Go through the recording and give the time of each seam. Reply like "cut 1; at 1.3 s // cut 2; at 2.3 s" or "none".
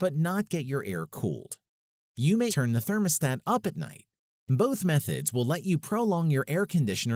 cut 1; at 2.5 s